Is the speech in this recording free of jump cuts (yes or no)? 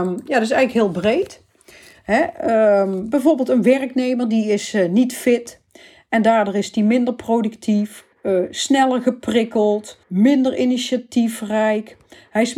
no